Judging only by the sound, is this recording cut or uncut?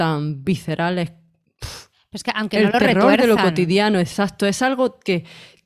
cut